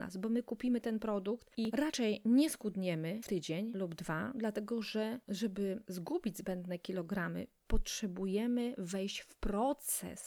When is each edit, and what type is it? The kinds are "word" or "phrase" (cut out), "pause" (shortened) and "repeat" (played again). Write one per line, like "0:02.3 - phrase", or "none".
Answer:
none